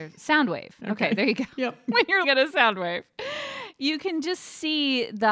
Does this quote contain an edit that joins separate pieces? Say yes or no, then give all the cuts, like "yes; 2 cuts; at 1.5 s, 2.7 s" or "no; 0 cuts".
yes; 1 cut; at 2.2 s